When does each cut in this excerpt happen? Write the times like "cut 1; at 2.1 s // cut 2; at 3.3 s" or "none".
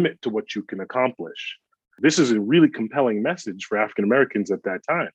none